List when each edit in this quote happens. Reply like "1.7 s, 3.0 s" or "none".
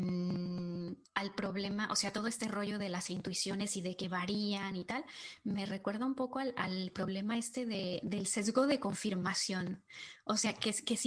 1.0 s